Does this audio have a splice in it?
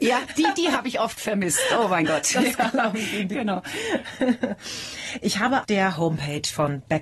yes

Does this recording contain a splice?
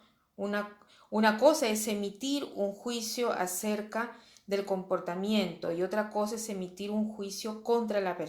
no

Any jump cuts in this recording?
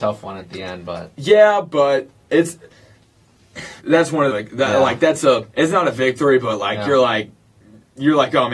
yes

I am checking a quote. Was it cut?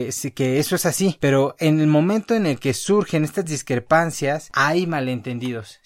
no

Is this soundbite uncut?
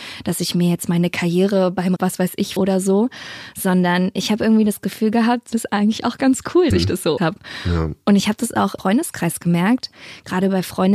no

